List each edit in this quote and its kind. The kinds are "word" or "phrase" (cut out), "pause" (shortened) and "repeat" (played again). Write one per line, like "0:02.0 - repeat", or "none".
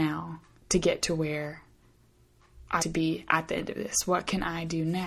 0:02.8 - word